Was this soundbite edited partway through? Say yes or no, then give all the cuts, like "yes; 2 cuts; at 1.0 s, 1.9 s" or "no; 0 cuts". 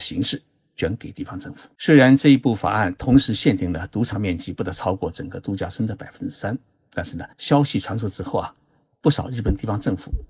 yes; 2 cuts; at 1.8 s, 7.3 s